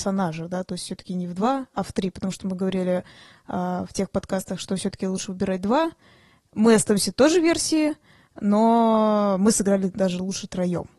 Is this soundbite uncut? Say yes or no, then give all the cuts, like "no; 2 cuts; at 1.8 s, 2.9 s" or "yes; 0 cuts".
yes; 0 cuts